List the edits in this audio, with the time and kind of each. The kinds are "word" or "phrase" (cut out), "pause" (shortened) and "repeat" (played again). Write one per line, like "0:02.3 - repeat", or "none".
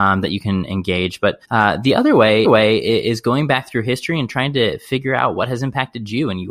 0:01.4 - pause
0:02.4 - repeat